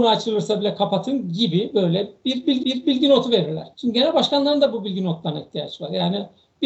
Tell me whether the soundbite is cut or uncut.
cut